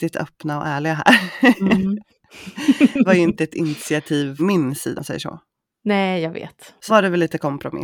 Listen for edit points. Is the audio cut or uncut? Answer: cut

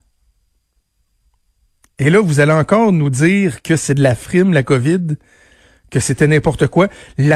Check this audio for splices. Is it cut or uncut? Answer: uncut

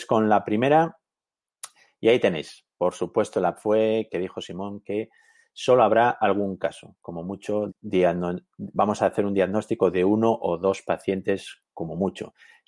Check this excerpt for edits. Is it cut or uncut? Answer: cut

